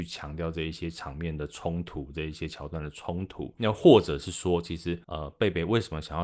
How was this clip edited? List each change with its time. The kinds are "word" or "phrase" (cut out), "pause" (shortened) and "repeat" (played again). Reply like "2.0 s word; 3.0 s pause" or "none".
5.0 s pause